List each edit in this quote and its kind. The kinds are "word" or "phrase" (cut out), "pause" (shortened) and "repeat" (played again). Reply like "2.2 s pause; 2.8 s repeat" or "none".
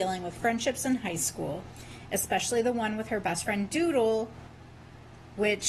none